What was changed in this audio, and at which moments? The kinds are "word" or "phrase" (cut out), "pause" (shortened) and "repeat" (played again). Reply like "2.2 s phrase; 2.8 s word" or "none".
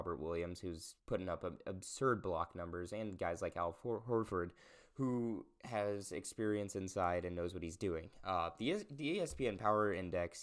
1.0 s pause